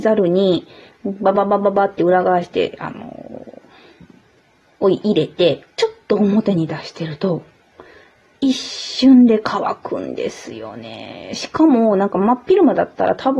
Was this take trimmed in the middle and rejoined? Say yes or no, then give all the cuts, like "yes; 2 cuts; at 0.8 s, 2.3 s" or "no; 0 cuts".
yes; 1 cut; at 5.7 s